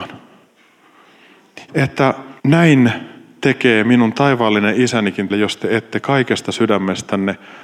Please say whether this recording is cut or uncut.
cut